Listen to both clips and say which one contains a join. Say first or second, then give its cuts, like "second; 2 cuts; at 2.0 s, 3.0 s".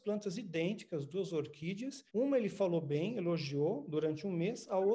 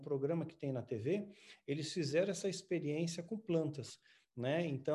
first; 1 cut; at 2.1 s